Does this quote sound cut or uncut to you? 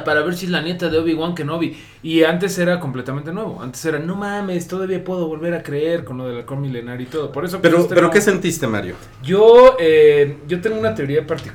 uncut